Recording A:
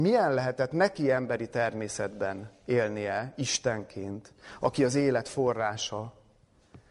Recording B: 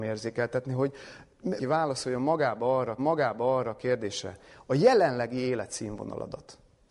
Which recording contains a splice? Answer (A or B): B